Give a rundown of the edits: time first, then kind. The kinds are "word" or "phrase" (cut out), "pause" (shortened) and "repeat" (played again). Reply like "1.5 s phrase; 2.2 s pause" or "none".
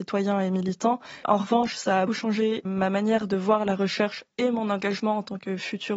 1.2 s word; 2.1 s word; 2.6 s word